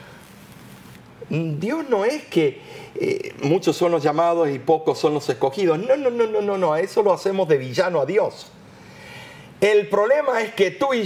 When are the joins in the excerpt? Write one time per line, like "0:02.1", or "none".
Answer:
none